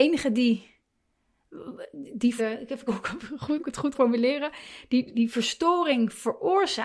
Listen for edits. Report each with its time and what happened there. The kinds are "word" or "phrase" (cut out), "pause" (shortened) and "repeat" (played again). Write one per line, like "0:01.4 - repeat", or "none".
0:02.4 - word
0:02.9 - word
0:03.6 - word
0:03.9 - word
0:05.1 - word